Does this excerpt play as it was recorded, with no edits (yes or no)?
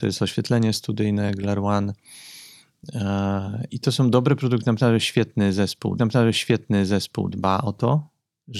no